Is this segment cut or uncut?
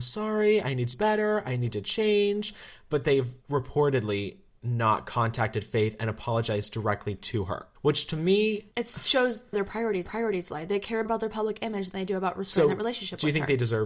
cut